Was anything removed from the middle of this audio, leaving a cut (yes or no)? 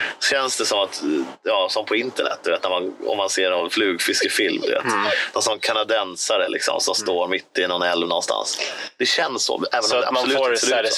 no